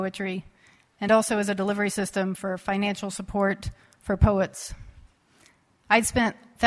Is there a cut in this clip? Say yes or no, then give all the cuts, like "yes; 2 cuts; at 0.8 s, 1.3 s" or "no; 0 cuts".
no; 0 cuts